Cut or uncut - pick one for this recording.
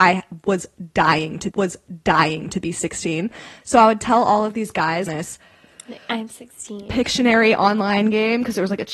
cut